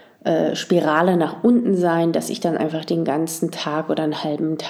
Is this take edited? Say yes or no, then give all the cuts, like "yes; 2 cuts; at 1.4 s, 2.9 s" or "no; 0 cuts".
no; 0 cuts